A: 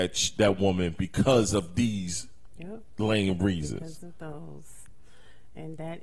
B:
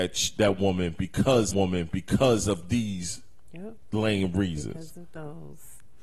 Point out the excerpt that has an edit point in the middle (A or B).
B